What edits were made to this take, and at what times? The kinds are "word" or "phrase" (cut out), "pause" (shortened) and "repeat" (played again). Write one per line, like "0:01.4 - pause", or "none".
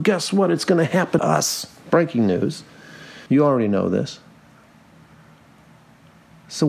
0:01.2 - word
0:03.3 - pause